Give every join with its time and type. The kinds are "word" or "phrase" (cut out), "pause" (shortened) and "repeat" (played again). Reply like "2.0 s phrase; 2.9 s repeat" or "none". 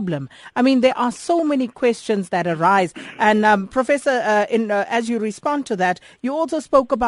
none